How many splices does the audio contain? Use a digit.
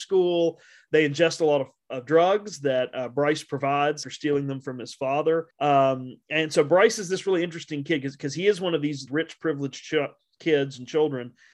3